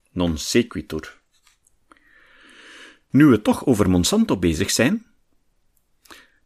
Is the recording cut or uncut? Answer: uncut